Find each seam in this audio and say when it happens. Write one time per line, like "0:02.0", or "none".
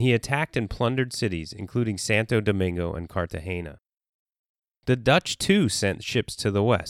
none